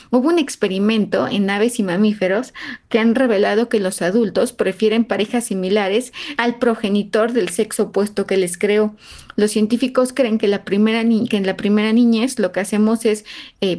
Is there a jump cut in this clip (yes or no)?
no